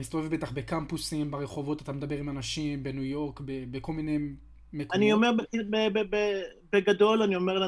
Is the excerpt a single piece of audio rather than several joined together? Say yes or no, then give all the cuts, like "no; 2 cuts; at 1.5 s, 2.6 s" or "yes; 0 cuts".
yes; 0 cuts